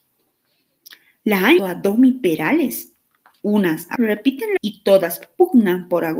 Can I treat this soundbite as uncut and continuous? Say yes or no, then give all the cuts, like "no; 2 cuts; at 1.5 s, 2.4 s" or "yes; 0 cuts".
no; 3 cuts; at 1.6 s, 4.0 s, 4.6 s